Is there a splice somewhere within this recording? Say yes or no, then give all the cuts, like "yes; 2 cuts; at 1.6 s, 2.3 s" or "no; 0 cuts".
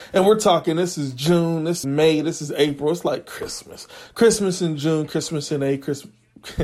yes; 1 cut; at 1.8 s